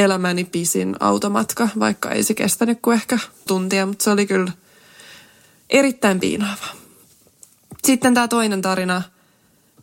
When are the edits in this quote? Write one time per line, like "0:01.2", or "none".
0:03.5